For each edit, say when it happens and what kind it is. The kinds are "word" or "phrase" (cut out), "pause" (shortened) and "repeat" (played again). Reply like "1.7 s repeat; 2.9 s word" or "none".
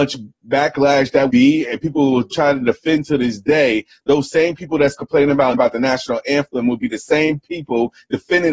1.3 s word; 2.3 s word; 5.5 s word